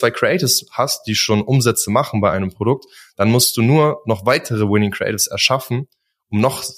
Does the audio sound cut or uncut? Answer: uncut